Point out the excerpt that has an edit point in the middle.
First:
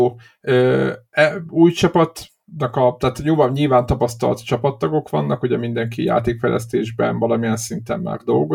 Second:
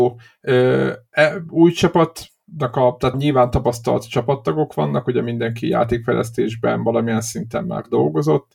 second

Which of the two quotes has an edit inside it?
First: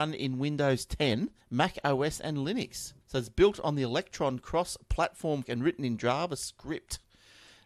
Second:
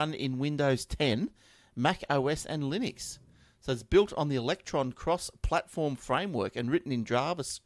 first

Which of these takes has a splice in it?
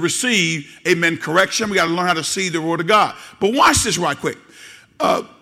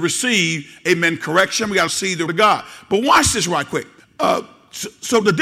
second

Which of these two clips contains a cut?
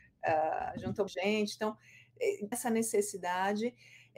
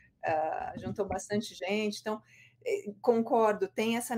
first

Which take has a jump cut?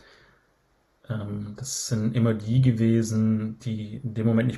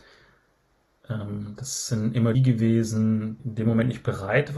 second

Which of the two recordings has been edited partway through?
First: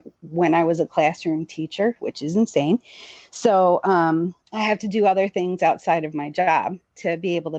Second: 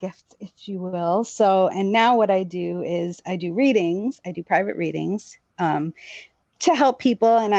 first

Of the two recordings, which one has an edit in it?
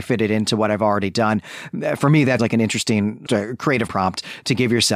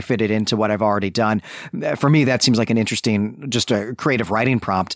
first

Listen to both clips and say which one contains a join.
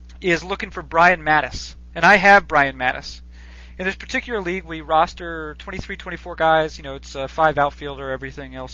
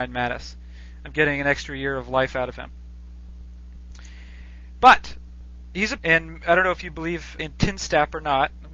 second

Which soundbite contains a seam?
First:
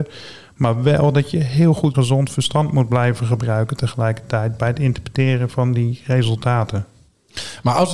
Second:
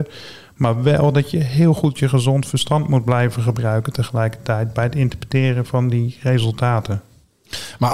first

